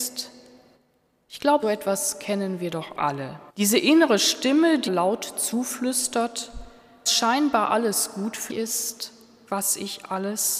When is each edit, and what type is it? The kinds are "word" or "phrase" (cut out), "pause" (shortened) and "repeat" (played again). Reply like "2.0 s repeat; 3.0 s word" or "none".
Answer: 1.6 s word; 3.5 s pause; 4.9 s phrase; 7.1 s word; 8.5 s word

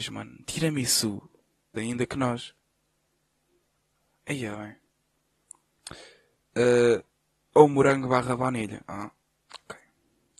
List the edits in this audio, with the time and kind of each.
1.8 s phrase; 7.3 s pause

